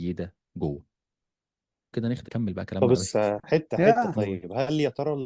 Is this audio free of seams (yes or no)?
no